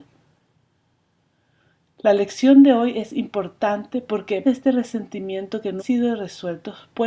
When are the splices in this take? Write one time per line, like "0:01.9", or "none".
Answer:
0:04.4
0:05.8